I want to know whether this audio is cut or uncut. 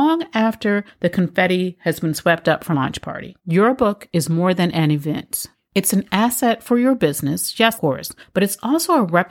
cut